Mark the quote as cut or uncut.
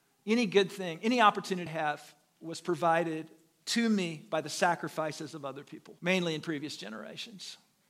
cut